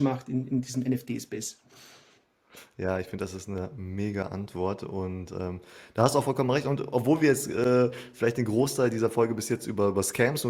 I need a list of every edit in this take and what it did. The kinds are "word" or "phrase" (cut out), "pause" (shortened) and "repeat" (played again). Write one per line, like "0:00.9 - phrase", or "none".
none